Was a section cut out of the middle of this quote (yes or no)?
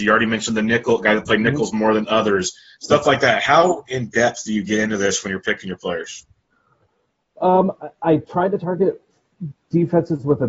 no